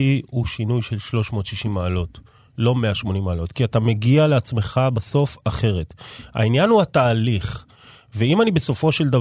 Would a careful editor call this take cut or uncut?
uncut